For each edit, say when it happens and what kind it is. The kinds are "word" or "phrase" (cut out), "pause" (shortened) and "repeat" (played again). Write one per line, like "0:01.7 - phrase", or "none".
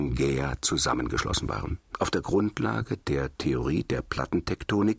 0:01.9 - pause